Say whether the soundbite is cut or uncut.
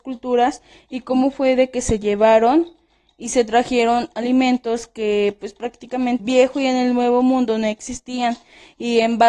cut